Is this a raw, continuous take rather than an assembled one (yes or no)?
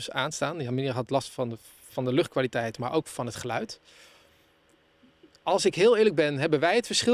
yes